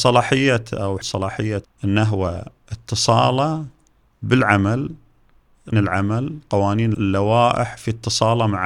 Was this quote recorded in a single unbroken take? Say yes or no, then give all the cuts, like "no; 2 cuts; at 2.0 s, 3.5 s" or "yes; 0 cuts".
no; 4 cuts; at 1.0 s, 1.6 s, 5.7 s, 6.9 s